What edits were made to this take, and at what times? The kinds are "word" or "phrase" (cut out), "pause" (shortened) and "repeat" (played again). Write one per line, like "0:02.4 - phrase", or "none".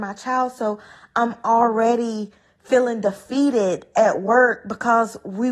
none